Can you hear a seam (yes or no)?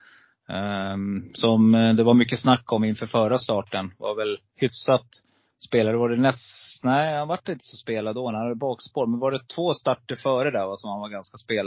no